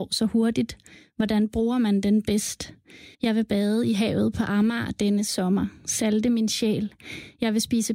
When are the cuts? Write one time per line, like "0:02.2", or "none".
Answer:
0:03.1